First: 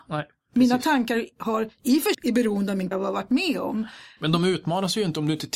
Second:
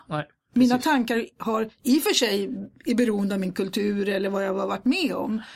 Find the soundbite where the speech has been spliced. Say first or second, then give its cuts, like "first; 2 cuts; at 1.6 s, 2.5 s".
first; 3 cuts; at 2.1 s, 2.9 s, 4.2 s